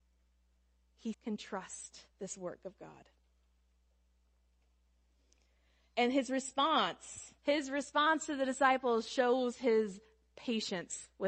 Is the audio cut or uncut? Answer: cut